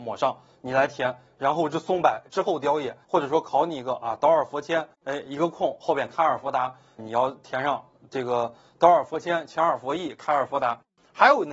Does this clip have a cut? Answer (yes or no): yes